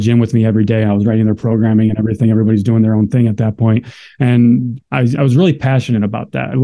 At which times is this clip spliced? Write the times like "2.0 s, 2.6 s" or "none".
none